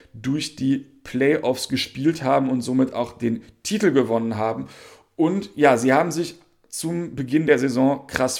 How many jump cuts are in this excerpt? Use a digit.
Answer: 0